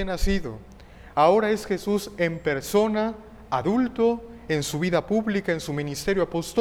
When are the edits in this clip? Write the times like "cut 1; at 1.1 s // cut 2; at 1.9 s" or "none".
none